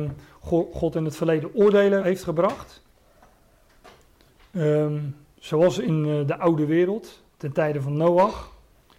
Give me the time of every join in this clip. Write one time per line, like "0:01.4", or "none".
0:02.0